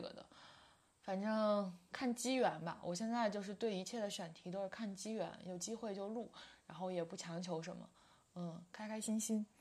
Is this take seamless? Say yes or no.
yes